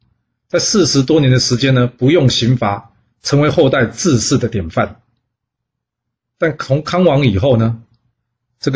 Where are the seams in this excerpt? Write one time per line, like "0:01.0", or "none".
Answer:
none